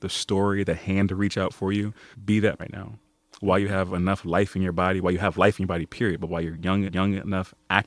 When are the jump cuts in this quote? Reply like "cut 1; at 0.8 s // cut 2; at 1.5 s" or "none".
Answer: cut 1; at 2.1 s // cut 2; at 2.6 s // cut 3; at 6.9 s